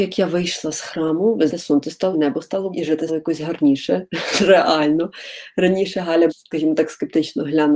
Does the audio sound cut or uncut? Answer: cut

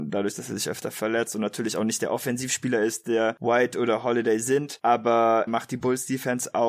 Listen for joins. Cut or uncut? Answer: cut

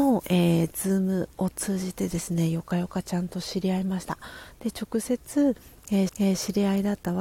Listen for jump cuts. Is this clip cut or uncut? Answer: cut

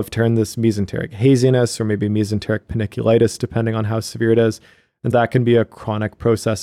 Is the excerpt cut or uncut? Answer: cut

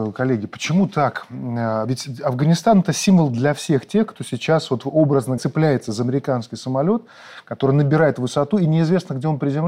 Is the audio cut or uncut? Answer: cut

